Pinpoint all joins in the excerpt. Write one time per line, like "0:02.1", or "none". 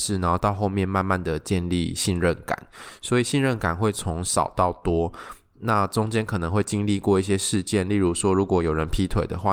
none